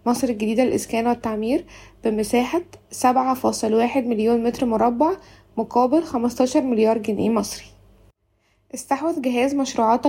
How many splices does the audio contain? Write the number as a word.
zero